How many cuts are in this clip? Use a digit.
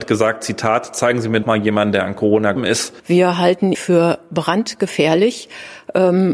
3